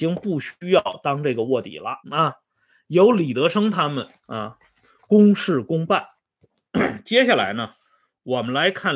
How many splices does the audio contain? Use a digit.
2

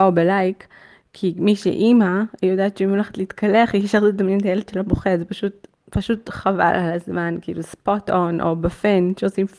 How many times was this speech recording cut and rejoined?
1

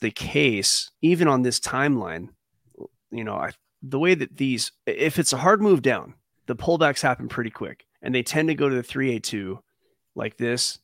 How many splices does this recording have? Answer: 4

